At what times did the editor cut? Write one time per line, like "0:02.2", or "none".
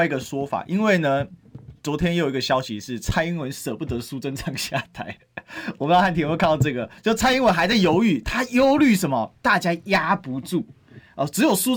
0:07.0